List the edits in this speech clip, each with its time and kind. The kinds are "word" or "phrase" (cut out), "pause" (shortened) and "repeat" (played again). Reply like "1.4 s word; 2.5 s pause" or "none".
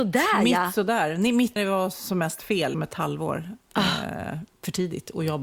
1.6 s word; 2.7 s word